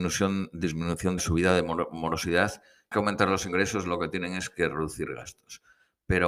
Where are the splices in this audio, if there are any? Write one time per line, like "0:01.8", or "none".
0:01.2
0:02.9